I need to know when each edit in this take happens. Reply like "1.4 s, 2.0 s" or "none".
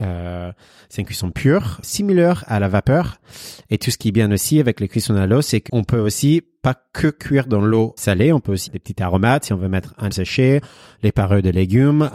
1.8 s, 5.7 s, 8.0 s, 8.7 s, 10.1 s